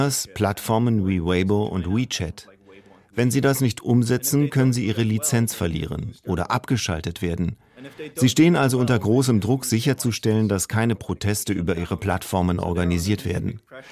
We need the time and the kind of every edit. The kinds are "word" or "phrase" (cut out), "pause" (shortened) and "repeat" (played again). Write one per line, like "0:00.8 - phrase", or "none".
none